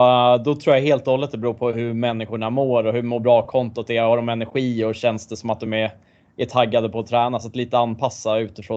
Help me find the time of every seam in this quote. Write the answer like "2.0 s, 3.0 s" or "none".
none